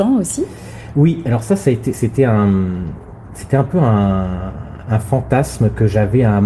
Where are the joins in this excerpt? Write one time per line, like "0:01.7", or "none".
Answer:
none